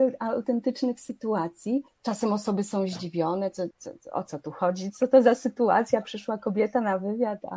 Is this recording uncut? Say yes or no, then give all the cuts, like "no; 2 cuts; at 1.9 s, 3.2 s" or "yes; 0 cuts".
no; 2 cuts; at 1.9 s, 3.7 s